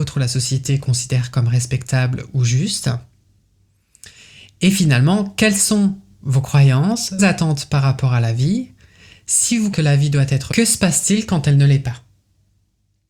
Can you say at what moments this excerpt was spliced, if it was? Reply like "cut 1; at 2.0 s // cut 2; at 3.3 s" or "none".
cut 1; at 7.2 s // cut 2; at 9.7 s // cut 3; at 10.5 s